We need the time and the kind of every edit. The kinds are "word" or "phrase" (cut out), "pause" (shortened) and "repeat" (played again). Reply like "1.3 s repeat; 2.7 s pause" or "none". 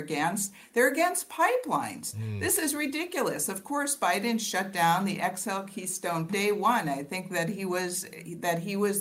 6.3 s phrase